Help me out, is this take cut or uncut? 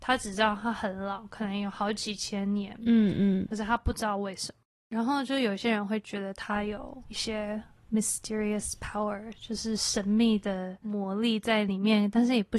uncut